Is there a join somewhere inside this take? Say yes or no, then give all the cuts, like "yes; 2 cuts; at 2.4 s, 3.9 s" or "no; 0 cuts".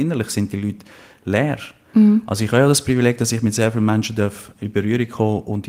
yes; 1 cut; at 4.5 s